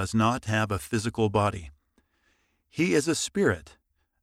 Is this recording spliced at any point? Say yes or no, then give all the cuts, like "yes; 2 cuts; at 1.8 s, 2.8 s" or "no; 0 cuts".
no; 0 cuts